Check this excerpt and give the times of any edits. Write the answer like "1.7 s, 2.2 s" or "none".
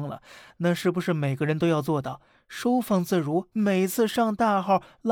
3.5 s

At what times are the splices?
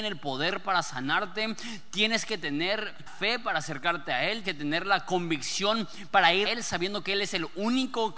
3.1 s, 4.4 s, 6.4 s

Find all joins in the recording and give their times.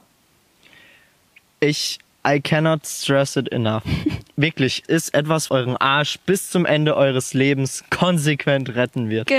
2.1 s, 4.8 s, 5.5 s

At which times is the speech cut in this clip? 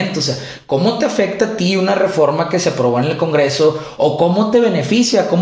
none

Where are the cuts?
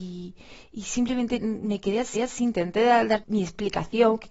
2.1 s, 3.2 s

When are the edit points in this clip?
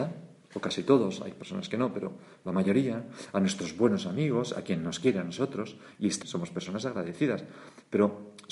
6.2 s

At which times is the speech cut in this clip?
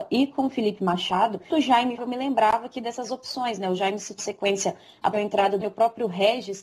1.5 s, 2.0 s, 4.2 s, 5.1 s, 5.6 s

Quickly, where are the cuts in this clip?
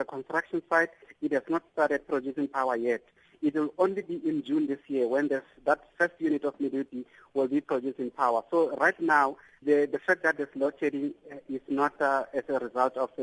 9.6 s

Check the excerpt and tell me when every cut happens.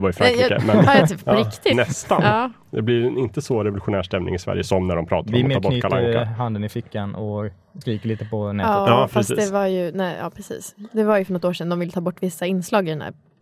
1.1 s, 1.7 s, 7.8 s

